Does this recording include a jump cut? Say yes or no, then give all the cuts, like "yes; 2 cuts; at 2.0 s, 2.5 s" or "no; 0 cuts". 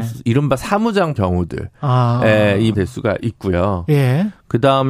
yes; 2 cuts; at 1.2 s, 2.7 s